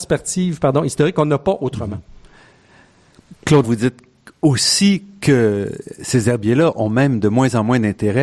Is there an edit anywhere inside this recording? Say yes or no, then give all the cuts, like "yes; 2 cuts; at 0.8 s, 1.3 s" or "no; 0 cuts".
yes; 1 cut; at 3.6 s